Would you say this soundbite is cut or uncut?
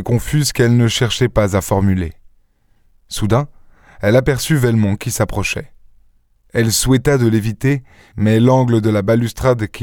uncut